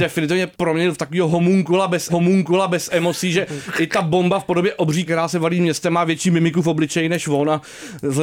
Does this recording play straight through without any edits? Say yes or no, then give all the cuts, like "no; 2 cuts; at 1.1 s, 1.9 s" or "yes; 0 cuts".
no; 2 cuts; at 2.1 s, 5.1 s